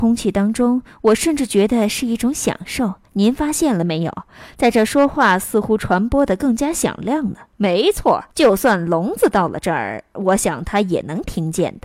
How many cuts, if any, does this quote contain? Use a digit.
2